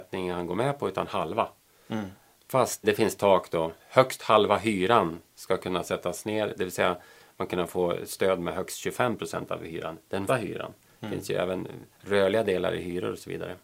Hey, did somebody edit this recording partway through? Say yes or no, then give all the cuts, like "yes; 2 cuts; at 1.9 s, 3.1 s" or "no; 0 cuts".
yes; 4 cuts; at 2.8 s, 7.5 s, 10.3 s, 11.9 s